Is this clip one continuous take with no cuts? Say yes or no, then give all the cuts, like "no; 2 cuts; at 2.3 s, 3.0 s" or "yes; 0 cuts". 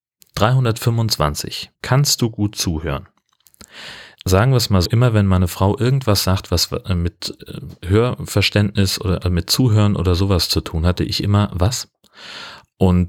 no; 3 cuts; at 1.8 s, 4.9 s, 11.0 s